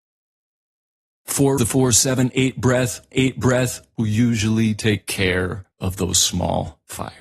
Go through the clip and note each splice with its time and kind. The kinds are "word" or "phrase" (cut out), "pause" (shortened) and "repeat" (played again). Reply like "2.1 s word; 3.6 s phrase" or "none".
1.6 s phrase; 3.1 s repeat; 5.7 s pause